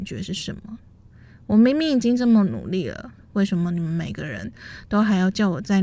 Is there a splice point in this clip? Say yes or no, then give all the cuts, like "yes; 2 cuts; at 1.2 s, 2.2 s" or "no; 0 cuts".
yes; 1 cut; at 3.2 s